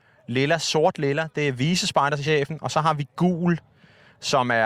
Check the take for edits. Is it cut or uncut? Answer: uncut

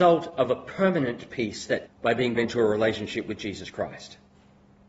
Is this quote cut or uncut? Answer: cut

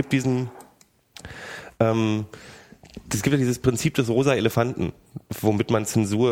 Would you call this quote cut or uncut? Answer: uncut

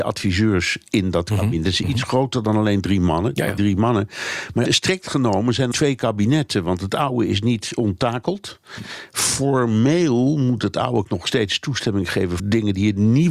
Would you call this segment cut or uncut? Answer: cut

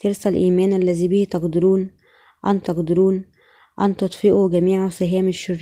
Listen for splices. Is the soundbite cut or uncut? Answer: cut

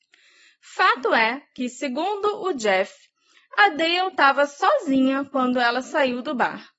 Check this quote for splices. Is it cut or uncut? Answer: uncut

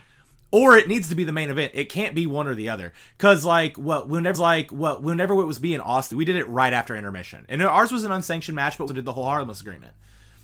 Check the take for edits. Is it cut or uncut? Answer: cut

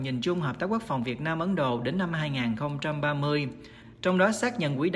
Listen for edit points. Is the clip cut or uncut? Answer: uncut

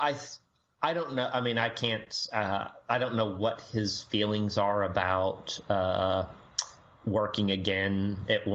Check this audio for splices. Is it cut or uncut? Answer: uncut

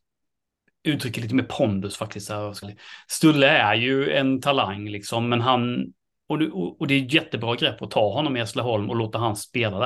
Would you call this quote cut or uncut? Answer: cut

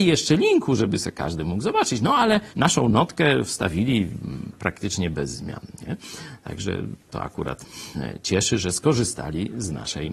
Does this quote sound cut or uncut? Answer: cut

